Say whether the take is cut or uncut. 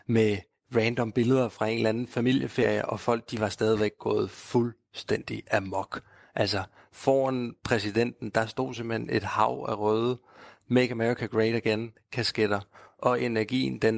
uncut